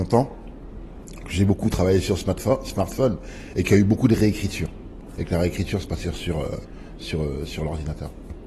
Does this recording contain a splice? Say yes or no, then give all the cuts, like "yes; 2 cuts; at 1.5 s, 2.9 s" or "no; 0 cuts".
no; 0 cuts